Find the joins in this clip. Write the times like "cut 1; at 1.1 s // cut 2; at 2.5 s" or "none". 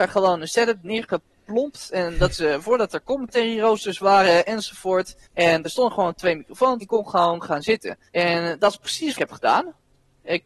cut 1; at 2.3 s // cut 2; at 5.2 s // cut 3; at 6.8 s // cut 4; at 8.1 s // cut 5; at 9.2 s